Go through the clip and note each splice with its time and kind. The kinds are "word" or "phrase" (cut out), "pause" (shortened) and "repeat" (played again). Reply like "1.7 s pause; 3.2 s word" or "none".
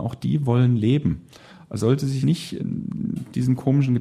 1.8 s word; 2.2 s word; 2.6 s word

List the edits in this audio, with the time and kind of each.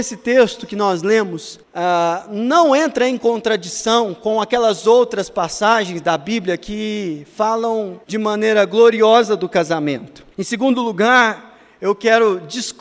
1.6 s pause; 8.0 s pause; 10.3 s pause

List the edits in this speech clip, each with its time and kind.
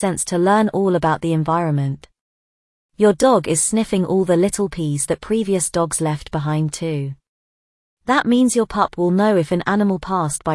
none

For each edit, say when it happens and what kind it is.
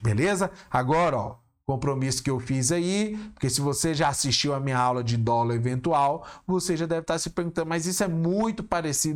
none

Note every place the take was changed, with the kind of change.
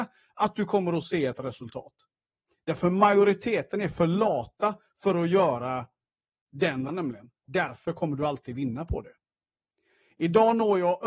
6.9 s word

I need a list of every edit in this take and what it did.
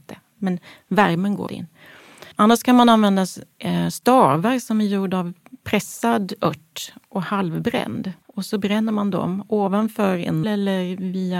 1.5 s word; 2.3 s pause; 8.2 s pause; 10.4 s word

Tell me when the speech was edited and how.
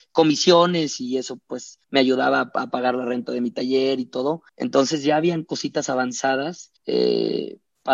1.8 s pause; 4.5 s pause; 6.8 s pause

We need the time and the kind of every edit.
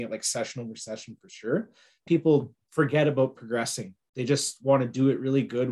2.1 s phrase

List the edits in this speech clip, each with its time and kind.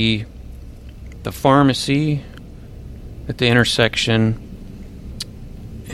none

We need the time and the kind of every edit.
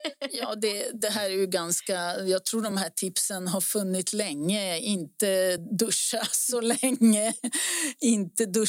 none

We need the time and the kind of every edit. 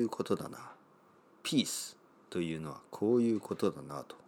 none

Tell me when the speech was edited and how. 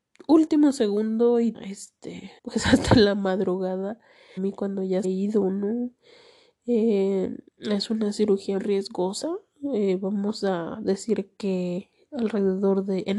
1.5 s word; 2.4 s pause; 4.4 s phrase; 5.0 s phrase; 7.5 s pause; 8.6 s word

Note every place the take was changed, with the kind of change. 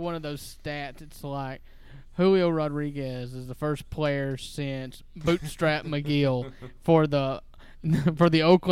none

